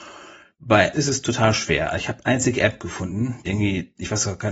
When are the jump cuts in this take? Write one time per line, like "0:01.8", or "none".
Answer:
0:00.9
0:02.2
0:03.4